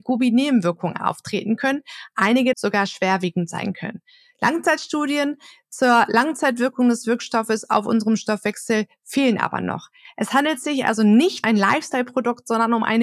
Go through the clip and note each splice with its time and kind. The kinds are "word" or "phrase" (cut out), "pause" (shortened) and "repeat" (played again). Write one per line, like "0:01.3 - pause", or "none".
0:02.5 - word
0:11.4 - word